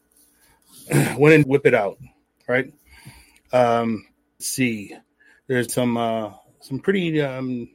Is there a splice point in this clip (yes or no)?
yes